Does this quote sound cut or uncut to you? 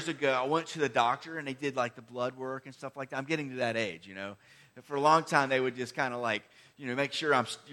uncut